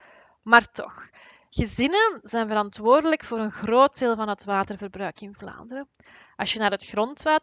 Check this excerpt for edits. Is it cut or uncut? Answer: uncut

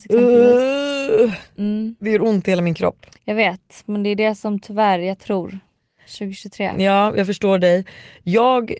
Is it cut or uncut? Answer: cut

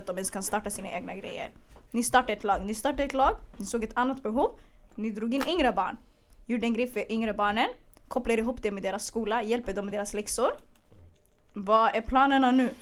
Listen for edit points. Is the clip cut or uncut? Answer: uncut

